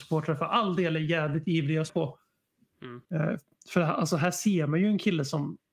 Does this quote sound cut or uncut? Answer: cut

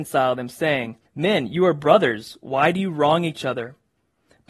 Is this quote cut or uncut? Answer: cut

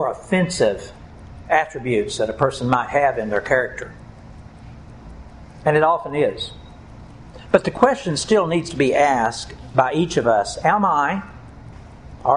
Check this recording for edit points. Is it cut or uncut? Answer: uncut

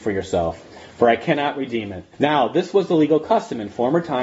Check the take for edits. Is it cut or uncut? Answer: cut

